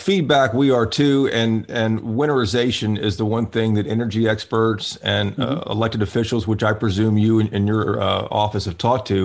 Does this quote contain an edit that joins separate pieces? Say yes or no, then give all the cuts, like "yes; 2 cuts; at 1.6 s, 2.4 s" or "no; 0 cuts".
no; 0 cuts